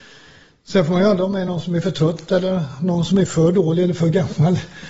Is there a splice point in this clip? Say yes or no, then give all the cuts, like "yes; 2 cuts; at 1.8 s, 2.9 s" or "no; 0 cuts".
no; 0 cuts